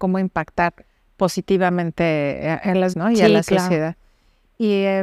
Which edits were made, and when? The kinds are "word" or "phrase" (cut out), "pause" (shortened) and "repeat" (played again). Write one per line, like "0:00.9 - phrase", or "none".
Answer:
0:02.9 - word